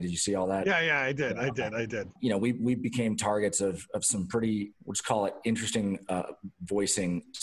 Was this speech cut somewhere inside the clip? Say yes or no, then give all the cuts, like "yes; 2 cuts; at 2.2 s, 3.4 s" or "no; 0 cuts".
yes; 1 cut; at 4.8 s